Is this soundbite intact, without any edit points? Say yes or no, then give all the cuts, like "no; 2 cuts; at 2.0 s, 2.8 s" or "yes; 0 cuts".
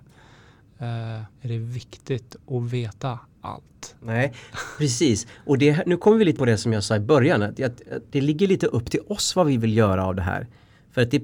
no; 3 cuts; at 1.3 s, 6.4 s, 8.1 s